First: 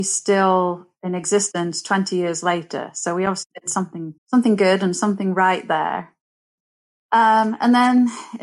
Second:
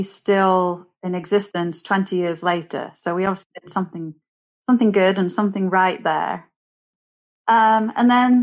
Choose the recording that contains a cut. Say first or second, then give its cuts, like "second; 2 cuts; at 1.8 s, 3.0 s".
first; 1 cut; at 4.2 s